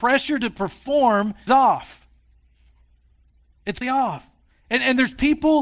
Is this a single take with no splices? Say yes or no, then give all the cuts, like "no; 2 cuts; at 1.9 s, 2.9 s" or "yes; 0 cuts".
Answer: no; 2 cuts; at 1.5 s, 3.8 s